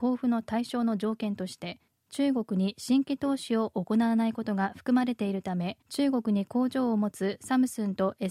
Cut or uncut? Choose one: cut